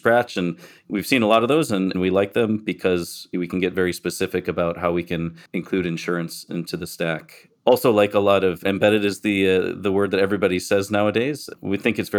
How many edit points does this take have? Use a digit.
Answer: 1